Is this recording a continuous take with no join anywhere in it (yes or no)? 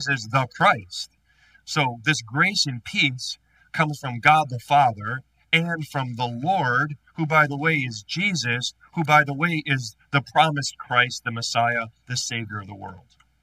yes